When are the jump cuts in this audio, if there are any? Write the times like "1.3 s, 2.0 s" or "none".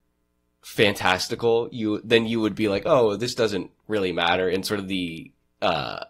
none